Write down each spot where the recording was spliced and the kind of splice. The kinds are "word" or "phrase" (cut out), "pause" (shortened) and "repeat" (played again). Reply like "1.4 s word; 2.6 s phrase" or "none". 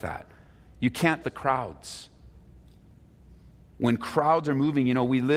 1.2 s word

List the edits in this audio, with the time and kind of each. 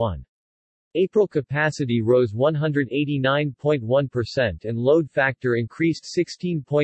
none

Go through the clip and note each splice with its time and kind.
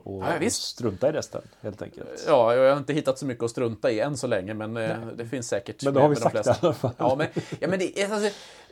none

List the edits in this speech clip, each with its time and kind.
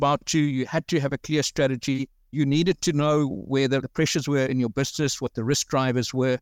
none

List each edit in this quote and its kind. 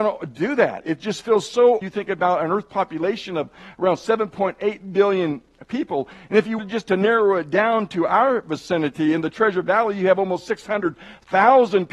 1.8 s phrase; 6.6 s word

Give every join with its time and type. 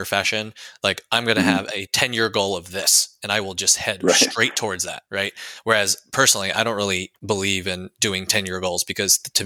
5.1 s pause; 7.2 s pause

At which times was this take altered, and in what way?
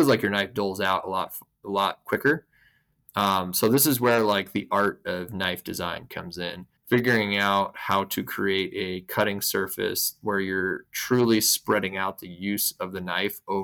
6.8 s pause

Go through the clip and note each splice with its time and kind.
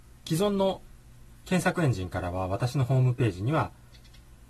1.3 s pause

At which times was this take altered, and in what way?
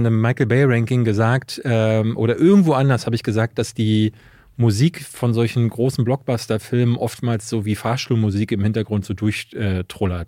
none

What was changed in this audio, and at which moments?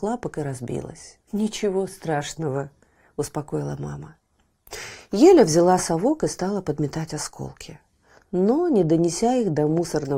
1.2 s pause

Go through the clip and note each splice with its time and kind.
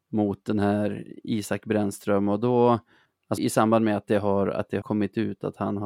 3.4 s word; 4.8 s word

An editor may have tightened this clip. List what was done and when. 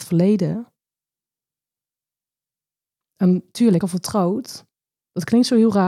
3.8 s phrase

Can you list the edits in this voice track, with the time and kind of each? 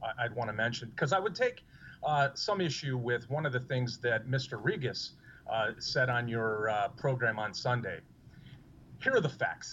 none

